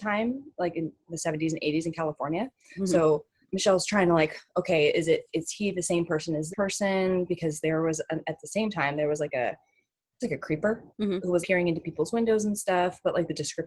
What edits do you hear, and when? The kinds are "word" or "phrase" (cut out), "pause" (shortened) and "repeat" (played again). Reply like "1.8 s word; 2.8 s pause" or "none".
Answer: 3.4 s pause; 6.5 s word; 10.2 s word; 10.9 s pause; 11.4 s word